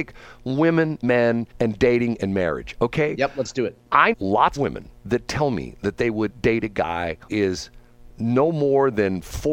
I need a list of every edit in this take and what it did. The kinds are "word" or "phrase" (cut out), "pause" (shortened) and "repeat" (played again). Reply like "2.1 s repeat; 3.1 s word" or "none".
1.0 s word; 1.5 s pause; 4.1 s word; 4.6 s word; 6.3 s word; 7.3 s word